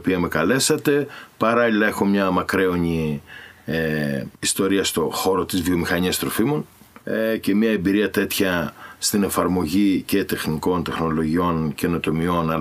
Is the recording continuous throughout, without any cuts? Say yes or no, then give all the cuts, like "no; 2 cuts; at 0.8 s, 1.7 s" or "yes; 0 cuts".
no; 2 cuts; at 4.4 s, 7.0 s